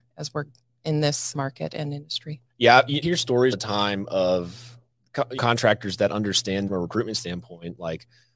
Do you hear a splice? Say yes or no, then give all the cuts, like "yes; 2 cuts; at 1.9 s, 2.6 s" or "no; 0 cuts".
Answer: yes; 6 cuts; at 1.3 s, 2.5 s, 3.0 s, 3.5 s, 5.4 s, 6.7 s